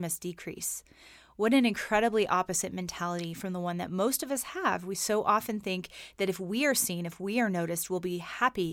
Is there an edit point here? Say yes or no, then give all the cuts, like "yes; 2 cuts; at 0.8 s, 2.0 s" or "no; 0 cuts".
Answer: no; 0 cuts